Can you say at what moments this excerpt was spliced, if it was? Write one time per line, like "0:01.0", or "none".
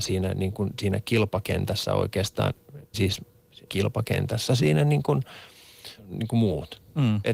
0:02.9
0:03.7
0:04.5
0:06.0